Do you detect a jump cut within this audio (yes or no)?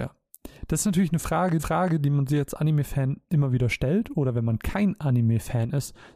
yes